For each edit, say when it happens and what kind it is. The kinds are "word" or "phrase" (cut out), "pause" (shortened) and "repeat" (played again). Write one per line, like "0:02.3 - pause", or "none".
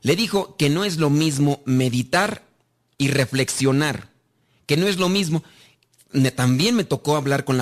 none